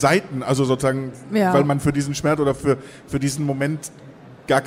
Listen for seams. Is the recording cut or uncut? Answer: uncut